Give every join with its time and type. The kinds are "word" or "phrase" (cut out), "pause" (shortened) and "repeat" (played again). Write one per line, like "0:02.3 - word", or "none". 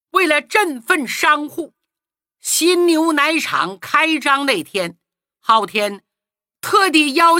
none